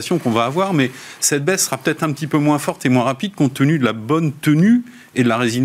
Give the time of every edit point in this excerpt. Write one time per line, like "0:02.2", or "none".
none